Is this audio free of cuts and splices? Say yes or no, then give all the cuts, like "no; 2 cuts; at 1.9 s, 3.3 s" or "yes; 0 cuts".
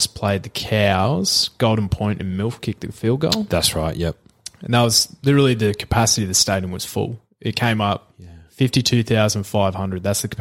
yes; 0 cuts